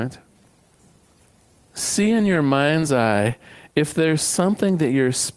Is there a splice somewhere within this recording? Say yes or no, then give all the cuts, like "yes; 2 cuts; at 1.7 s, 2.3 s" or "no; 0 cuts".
no; 0 cuts